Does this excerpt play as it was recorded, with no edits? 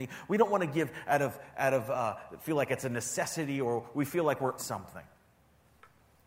no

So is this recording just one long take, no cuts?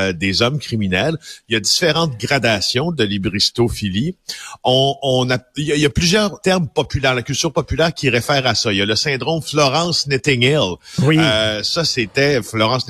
no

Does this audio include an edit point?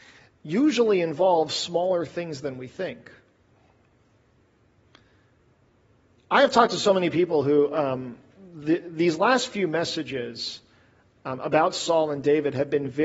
no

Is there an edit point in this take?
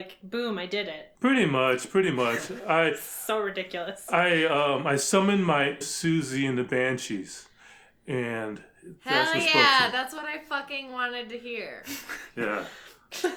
yes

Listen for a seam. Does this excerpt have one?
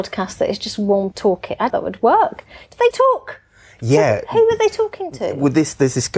yes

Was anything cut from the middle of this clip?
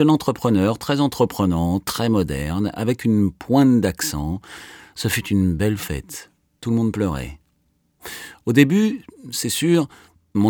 no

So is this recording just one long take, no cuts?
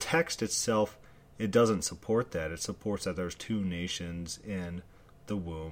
yes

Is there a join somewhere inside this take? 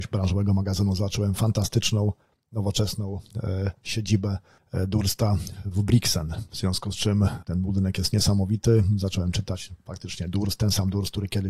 no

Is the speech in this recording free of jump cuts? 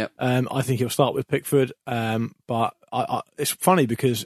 yes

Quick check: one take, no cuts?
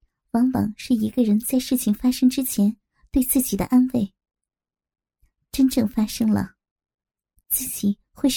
yes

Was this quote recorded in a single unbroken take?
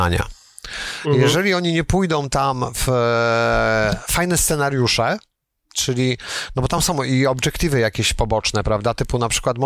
yes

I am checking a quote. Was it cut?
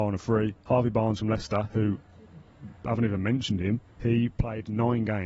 yes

